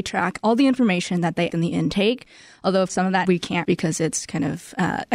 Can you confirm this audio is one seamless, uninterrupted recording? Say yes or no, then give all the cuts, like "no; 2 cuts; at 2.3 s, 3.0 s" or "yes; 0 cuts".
no; 4 cuts; at 1.5 s, 2.9 s, 3.2 s, 3.6 s